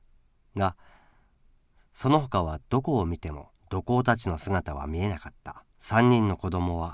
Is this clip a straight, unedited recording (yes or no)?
no